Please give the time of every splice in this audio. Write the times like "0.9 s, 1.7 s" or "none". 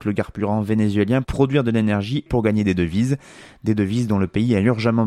1.2 s, 2.3 s